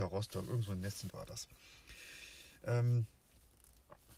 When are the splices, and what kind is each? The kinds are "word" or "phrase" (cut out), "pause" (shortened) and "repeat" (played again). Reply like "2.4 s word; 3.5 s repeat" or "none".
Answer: 1.1 s word

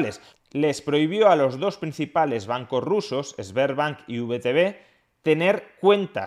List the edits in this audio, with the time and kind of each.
none

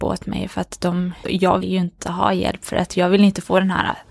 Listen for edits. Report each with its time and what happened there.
1.2 s word; 1.6 s word

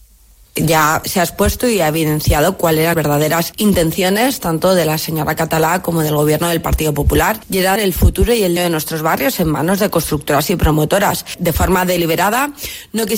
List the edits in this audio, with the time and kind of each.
1.0 s word; 2.9 s word; 7.8 s word; 8.6 s word

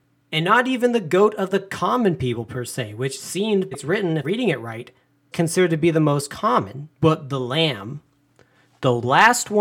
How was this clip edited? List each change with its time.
3.7 s phrase; 4.2 s word; 5.3 s word; 6.9 s pause

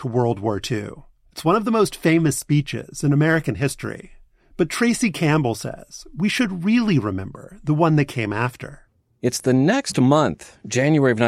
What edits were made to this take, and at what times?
none

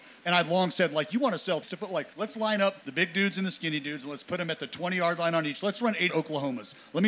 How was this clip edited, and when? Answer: 1.6 s word; 2.1 s pause; 2.8 s pause; 6.1 s word

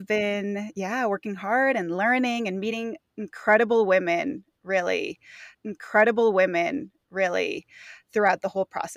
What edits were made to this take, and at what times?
5.5 s repeat

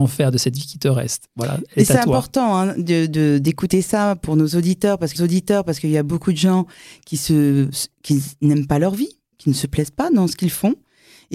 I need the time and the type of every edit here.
5.2 s repeat

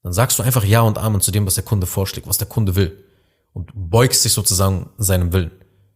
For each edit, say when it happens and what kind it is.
none

